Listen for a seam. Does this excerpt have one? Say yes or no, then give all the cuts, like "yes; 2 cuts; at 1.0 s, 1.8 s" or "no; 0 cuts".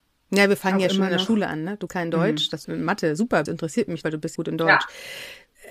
yes; 5 cuts; at 1.9 s, 2.6 s, 3.5 s, 4.0 s, 4.4 s